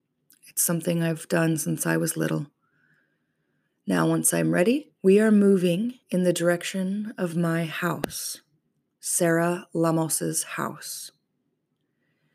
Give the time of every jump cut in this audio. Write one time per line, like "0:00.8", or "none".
0:05.0
0:06.0